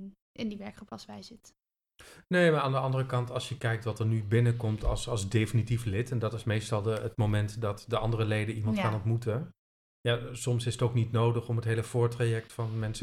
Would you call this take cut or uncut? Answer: uncut